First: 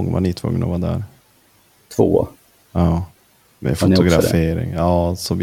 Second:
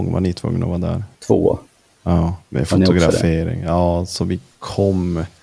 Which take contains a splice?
second; 2 cuts; at 1.1 s, 2.4 s

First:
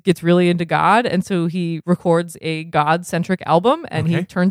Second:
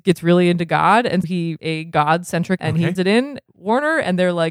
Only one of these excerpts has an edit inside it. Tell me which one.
second; 5 cuts; at 1.2 s, 1.6 s, 2.6 s, 3.0 s, 3.5 s

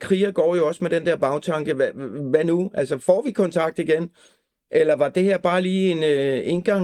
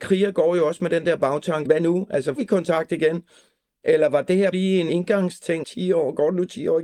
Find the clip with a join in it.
second; 5 cuts; at 1.7 s, 2.4 s, 4.5 s, 4.9 s, 5.6 s

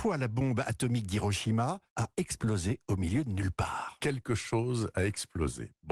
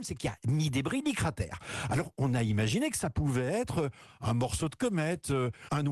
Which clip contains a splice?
first; 1 cut; at 1.9 s

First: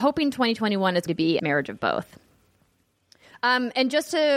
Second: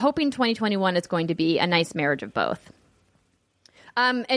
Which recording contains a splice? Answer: first; 2 cuts; at 1.1 s, 1.4 s

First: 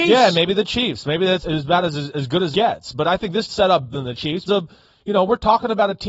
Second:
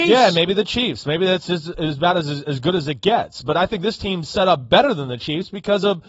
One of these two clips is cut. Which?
first; 5 cuts; at 1.4 s, 2.5 s, 3.5 s, 3.9 s, 4.5 s

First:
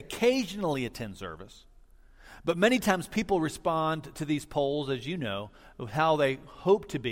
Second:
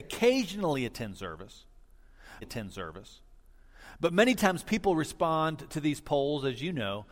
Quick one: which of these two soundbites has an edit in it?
second; 1 cut; at 2.4 s

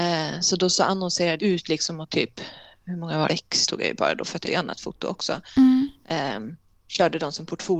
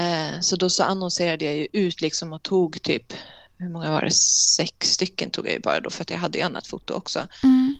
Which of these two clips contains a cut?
first; 6 cuts; at 1.4 s, 2.1 s, 3.3 s, 3.7 s, 4.4 s, 6.7 s

